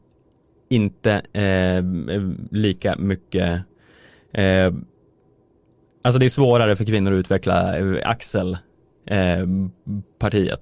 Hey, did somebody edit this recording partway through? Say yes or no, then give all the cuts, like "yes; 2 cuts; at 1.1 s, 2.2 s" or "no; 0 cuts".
no; 0 cuts